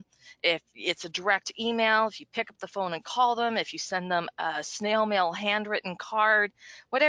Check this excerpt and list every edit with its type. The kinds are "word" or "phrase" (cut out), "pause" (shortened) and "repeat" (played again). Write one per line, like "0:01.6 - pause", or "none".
none